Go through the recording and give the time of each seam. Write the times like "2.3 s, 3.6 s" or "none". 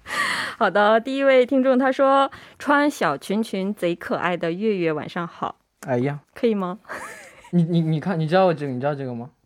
6.2 s